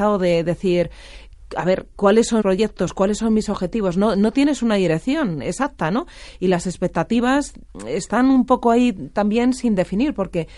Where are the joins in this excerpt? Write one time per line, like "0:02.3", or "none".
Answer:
0:01.9
0:02.4